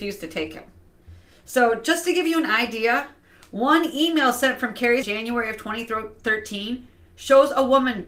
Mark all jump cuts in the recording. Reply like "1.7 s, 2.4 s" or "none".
5.0 s